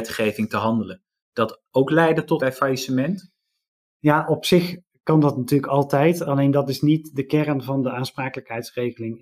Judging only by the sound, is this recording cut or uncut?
cut